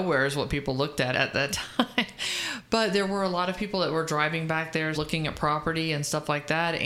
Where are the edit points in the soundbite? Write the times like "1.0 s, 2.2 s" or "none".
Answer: 1.1 s, 4.9 s